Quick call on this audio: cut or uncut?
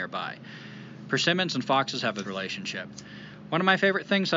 cut